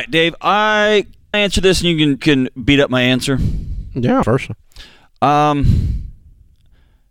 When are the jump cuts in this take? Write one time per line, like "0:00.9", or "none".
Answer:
0:01.3
0:02.2
0:04.2

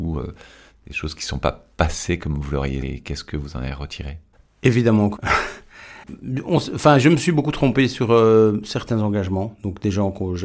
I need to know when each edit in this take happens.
0:02.8
0:05.2

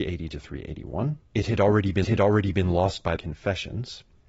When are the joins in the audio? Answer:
0:01.3
0:02.0
0:03.2

